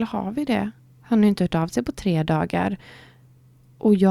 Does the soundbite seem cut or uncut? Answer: uncut